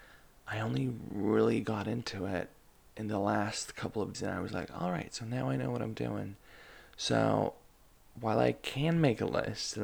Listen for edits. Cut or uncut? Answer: cut